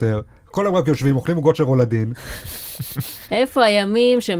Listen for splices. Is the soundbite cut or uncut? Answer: uncut